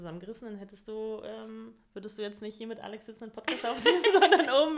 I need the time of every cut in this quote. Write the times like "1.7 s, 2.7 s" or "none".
none